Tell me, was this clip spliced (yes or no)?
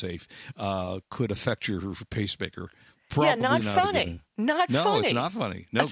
no